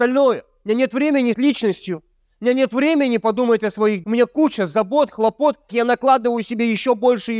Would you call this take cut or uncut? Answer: cut